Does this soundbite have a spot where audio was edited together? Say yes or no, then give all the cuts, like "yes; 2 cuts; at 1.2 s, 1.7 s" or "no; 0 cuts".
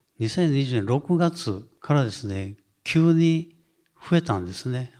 no; 0 cuts